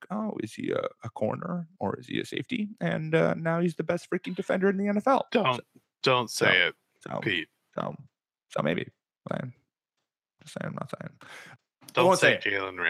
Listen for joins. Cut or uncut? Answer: cut